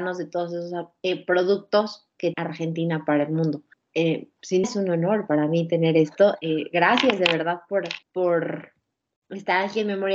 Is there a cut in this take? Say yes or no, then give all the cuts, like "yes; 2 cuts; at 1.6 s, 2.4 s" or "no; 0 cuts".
yes; 4 cuts; at 2.3 s, 3.7 s, 4.6 s, 8.0 s